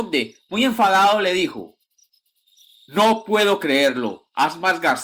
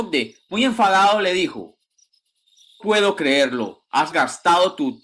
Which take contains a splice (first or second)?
second